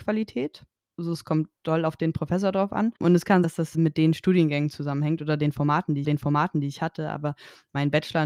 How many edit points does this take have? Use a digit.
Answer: 4